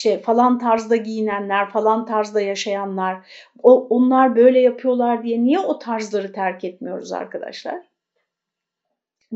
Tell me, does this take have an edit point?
no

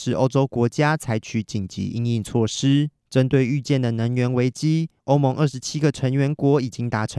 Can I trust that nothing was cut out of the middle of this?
no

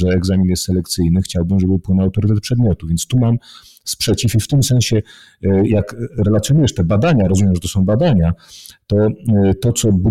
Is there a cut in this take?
no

